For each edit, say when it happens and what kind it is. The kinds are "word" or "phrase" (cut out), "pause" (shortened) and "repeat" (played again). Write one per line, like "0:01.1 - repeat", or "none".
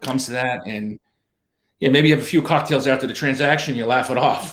none